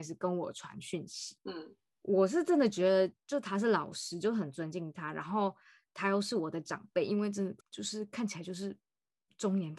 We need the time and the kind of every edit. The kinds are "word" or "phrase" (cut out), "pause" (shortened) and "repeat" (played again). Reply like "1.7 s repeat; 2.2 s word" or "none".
7.6 s pause